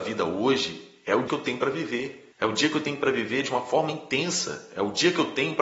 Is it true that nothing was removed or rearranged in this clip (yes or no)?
no